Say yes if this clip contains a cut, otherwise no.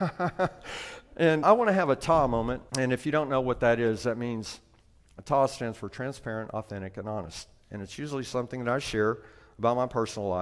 yes